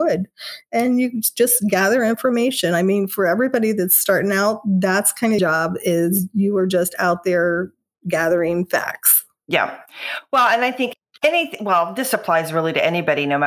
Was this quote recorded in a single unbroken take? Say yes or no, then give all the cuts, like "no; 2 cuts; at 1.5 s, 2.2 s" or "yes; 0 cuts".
no; 1 cut; at 5.4 s